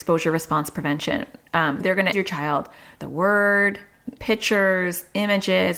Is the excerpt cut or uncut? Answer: cut